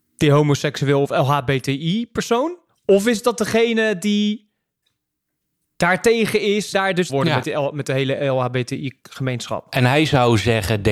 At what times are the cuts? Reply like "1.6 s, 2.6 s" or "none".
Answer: 2.7 s, 6.7 s, 7.1 s